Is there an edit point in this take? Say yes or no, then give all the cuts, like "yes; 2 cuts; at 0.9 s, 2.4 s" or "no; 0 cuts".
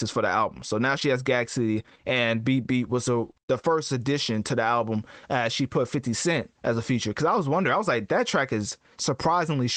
yes; 2 cuts; at 3.4 s, 6.6 s